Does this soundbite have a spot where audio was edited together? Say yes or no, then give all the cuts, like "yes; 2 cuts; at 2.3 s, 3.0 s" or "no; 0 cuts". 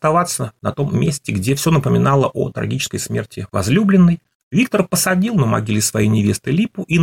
no; 0 cuts